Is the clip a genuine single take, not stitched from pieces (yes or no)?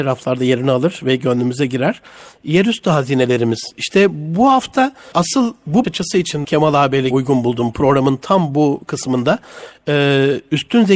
no